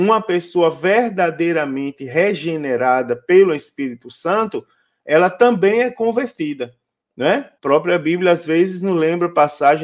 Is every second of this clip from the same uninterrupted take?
no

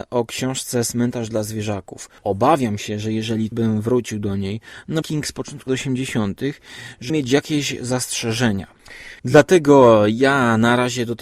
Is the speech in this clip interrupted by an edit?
yes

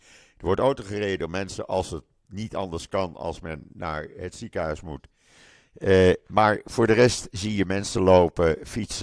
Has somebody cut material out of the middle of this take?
no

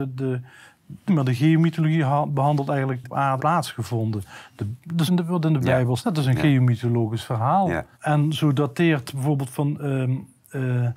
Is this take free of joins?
no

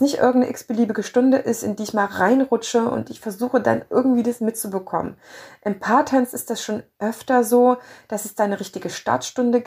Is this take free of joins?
yes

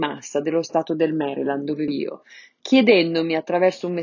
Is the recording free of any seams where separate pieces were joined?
no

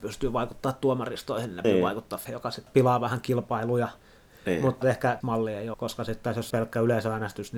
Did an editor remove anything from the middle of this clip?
yes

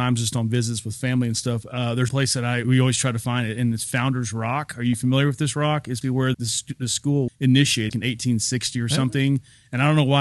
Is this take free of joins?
no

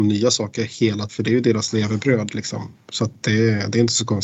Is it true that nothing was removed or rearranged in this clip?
no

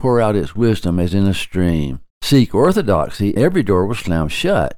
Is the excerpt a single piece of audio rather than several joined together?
no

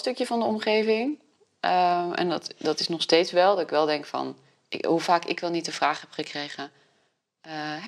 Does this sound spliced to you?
no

